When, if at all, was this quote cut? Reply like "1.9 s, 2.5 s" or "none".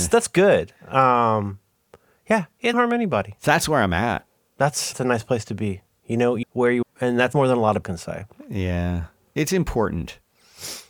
2.7 s, 4.9 s, 6.4 s, 6.8 s, 7.3 s, 7.8 s